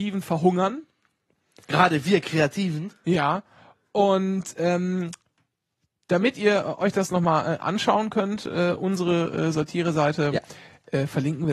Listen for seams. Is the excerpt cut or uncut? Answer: uncut